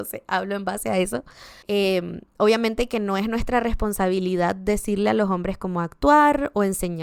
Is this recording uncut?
no; 1 cut; at 1.6 s

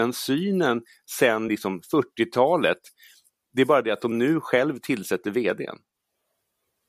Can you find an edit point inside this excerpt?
no; 0 cuts

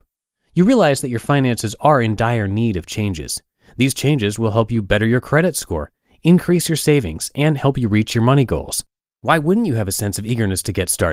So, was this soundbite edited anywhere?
no; 0 cuts

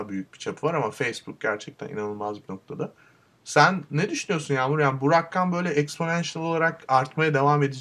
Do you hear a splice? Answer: no; 0 cuts

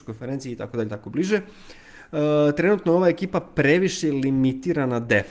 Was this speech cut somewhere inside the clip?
no; 0 cuts

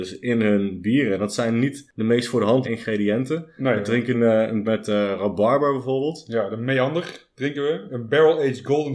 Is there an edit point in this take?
yes; 3 cuts; at 2.6 s, 4.1 s, 4.6 s

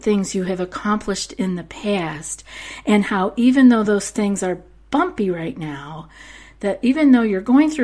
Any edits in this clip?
no; 0 cuts

